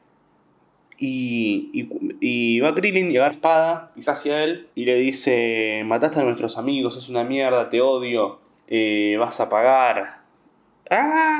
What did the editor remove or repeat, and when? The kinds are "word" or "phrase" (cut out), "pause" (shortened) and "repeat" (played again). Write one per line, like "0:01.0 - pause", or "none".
0:03.3 - word
0:04.1 - word
0:04.7 - pause
0:08.5 - pause